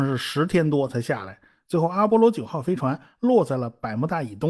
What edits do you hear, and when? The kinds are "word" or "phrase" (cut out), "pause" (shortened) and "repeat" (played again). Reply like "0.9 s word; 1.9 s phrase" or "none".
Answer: none